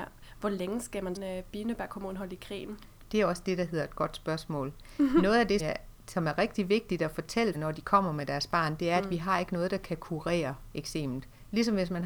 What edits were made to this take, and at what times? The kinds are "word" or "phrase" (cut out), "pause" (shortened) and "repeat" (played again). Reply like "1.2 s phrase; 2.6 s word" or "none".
1.2 s phrase; 5.6 s word; 7.5 s word